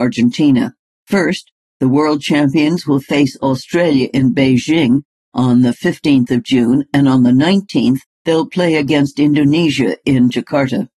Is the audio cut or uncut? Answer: uncut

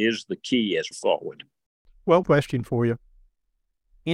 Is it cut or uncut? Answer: cut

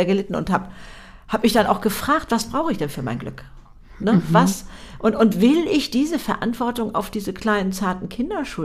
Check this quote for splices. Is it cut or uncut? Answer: uncut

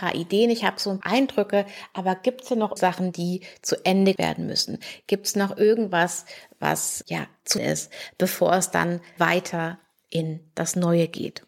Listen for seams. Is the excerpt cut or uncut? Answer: cut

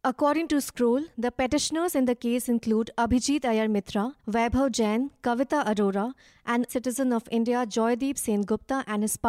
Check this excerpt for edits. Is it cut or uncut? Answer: cut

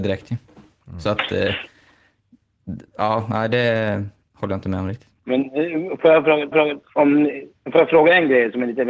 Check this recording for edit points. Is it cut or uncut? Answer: cut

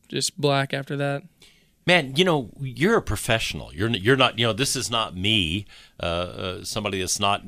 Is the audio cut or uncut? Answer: uncut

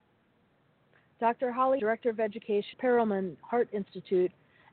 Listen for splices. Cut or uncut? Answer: cut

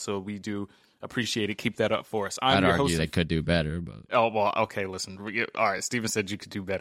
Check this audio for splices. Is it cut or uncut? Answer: uncut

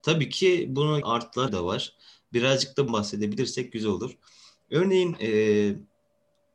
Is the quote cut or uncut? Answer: cut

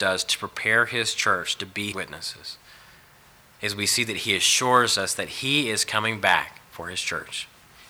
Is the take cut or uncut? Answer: cut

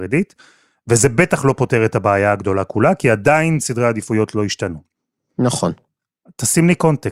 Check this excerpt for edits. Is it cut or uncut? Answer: uncut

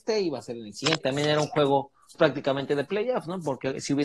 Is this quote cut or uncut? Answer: cut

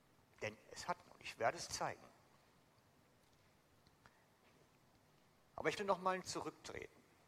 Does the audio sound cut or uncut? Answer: cut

